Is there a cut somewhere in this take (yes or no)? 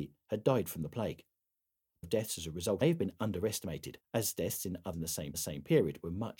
yes